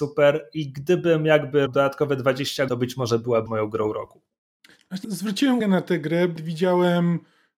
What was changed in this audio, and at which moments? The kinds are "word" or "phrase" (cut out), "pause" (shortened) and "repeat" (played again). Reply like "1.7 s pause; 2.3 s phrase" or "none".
1.7 s word; 2.7 s word; 3.5 s word; 5.0 s word; 5.6 s word; 6.4 s word